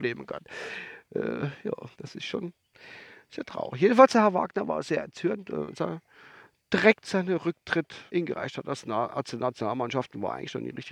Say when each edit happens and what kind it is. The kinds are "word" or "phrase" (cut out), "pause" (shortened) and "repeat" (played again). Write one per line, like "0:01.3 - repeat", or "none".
0:01.9 - pause
0:05.8 - phrase
0:08.1 - pause